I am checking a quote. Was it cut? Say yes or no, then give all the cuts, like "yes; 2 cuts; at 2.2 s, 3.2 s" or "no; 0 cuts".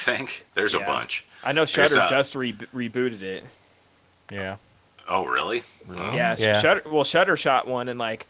no; 0 cuts